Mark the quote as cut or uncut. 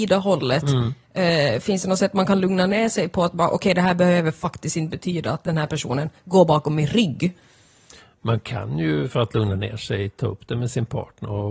uncut